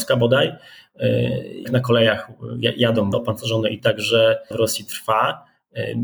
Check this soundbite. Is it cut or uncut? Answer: cut